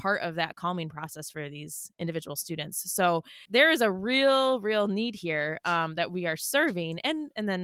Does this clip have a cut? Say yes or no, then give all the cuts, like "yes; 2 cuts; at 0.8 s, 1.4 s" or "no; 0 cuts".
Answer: yes; 1 cut; at 3.5 s